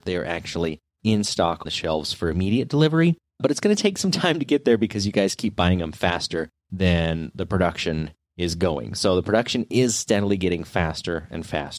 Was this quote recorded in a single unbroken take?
no; 1 cut; at 1.7 s

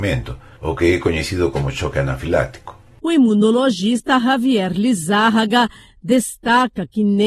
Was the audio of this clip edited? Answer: no; 0 cuts

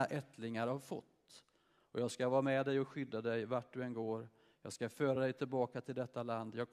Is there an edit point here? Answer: no; 0 cuts

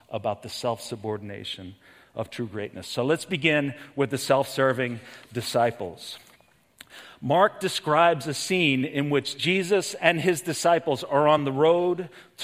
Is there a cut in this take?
no; 0 cuts

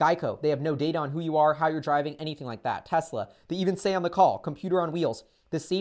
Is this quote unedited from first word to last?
yes; 0 cuts

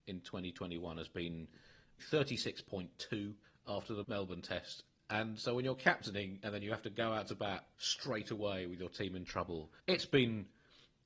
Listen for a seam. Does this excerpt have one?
yes; 5 cuts; at 2.0 s, 3.4 s, 4.0 s, 7.7 s, 9.8 s

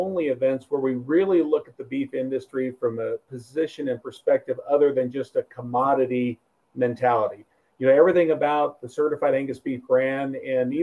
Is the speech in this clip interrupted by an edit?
no; 0 cuts

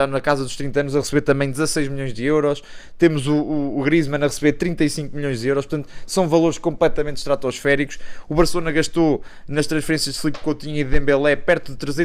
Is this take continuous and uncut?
yes; 0 cuts

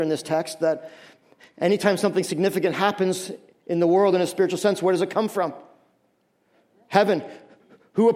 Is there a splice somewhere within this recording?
no; 0 cuts

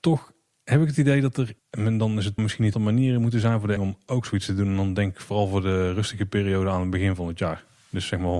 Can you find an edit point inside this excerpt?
yes; 4 cuts; at 1.6 s, 2.4 s, 2.7 s, 3.8 s

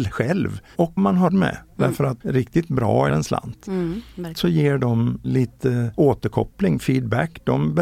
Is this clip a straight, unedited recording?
no; 5 cuts; at 1.0 s, 1.3 s, 2.2 s, 3.1 s, 4.3 s

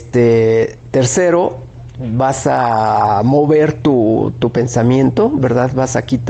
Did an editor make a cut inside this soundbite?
no; 0 cuts

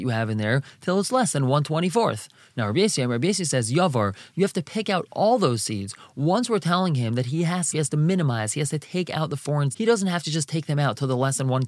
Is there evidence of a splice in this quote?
yes; 2 cuts; at 7.7 s, 9.7 s

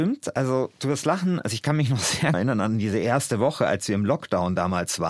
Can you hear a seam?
yes; 1 cut; at 2.3 s

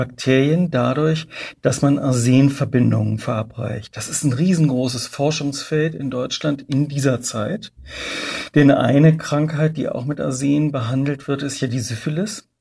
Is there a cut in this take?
no; 0 cuts

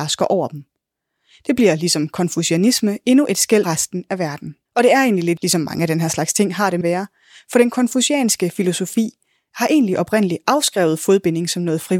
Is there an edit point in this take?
yes; 4 cuts; at 3.6 s, 4.7 s, 5.4 s, 6.8 s

